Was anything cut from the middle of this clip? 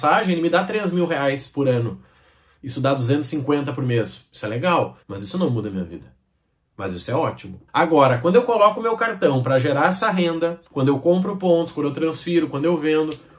yes; 3 cuts; at 5.0 s, 7.7 s, 10.7 s

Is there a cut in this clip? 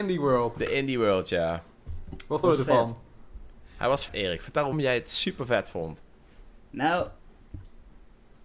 yes; 3 cuts; at 2.4 s, 4.1 s, 4.7 s

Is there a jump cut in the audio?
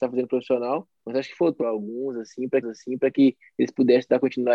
yes; 3 cuts; at 1.0 s, 1.6 s, 2.6 s

